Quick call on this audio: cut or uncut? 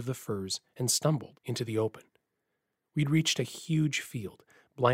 cut